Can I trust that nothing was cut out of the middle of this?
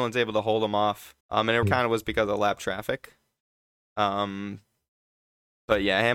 no; 2 cuts; at 1.2 s, 1.6 s

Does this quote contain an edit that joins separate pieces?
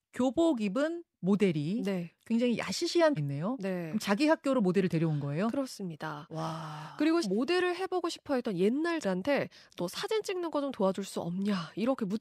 yes; 4 cuts; at 1.1 s, 3.2 s, 7.2 s, 9.0 s

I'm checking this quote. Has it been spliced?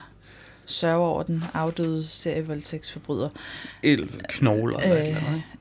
no; 0 cuts

